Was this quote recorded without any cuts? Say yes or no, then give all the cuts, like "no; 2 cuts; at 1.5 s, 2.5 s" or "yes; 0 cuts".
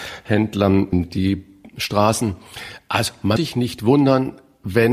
no; 2 cuts; at 0.9 s, 3.4 s